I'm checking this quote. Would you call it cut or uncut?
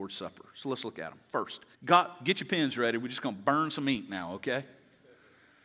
cut